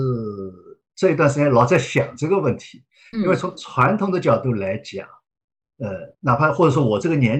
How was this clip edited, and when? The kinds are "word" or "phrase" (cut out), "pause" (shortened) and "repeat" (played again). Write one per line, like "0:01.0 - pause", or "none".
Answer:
0:06.1 - pause